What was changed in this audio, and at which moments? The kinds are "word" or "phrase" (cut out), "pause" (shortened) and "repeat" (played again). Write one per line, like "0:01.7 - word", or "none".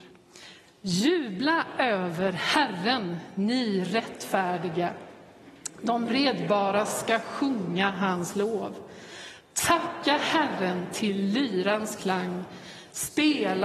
none